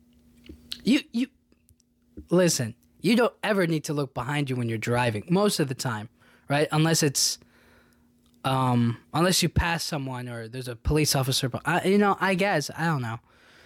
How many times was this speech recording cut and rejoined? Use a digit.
0